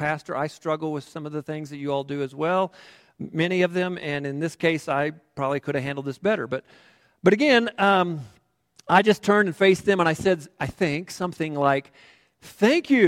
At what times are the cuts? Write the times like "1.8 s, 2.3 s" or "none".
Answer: none

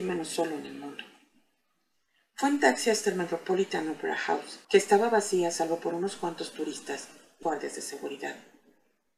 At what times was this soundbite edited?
4.6 s, 7.4 s

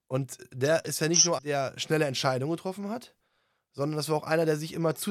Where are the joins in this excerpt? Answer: 1.4 s

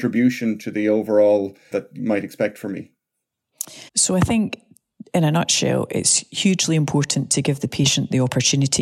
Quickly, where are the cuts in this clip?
1.7 s, 3.9 s

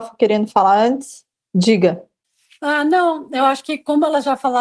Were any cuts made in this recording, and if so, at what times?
2.2 s

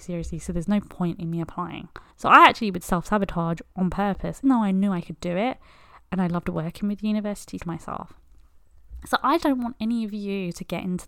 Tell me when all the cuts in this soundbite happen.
2.1 s, 4.4 s, 7.6 s, 9.4 s

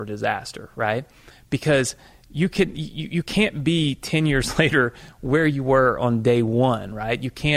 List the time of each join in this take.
none

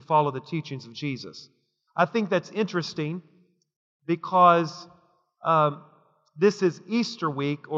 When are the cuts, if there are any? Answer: none

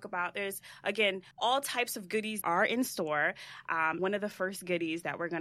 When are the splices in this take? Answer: 1.3 s, 2.4 s, 4.0 s

